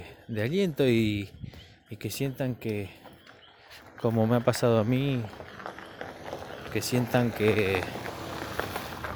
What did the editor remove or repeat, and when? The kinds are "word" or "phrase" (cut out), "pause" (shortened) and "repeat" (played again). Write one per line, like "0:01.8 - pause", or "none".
none